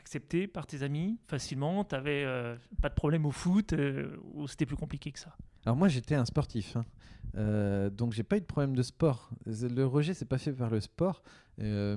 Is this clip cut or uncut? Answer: cut